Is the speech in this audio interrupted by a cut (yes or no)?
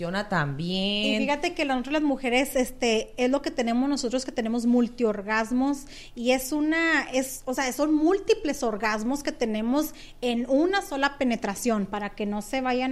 no